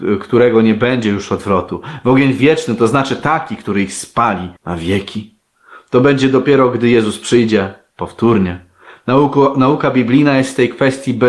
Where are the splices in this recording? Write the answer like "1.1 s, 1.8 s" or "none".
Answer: 4.6 s